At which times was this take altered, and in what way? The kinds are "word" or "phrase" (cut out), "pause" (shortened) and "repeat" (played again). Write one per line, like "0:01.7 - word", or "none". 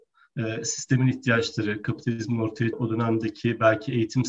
0:02.7 - word